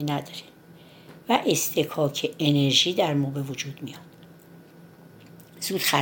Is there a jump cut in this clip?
no; 0 cuts

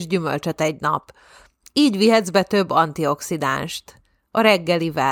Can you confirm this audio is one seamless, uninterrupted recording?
yes; 0 cuts

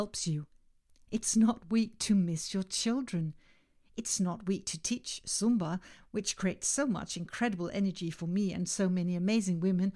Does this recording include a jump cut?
no; 0 cuts

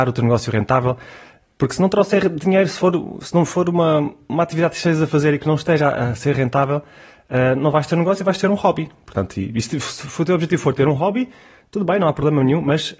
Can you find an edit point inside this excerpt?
no; 0 cuts

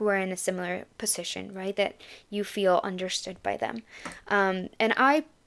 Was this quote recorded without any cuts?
yes; 0 cuts

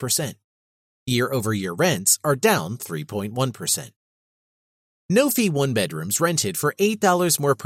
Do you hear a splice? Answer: no; 0 cuts

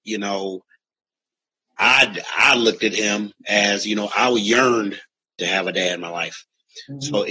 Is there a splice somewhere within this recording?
no; 0 cuts

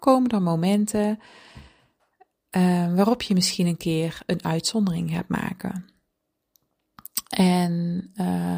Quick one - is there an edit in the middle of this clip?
no; 0 cuts

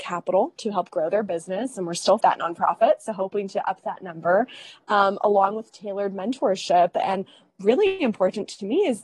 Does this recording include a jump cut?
yes; 1 cut; at 2.2 s

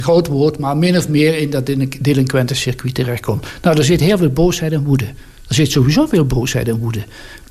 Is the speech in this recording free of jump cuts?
yes; 0 cuts

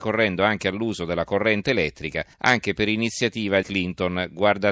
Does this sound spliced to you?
yes; 2 cuts; at 2.3 s, 3.6 s

